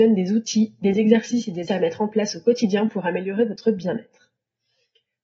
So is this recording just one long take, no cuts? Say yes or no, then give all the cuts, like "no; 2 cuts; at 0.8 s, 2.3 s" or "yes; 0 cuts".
no; 1 cut; at 1.7 s